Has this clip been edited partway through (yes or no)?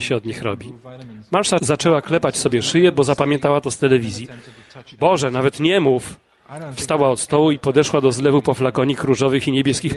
no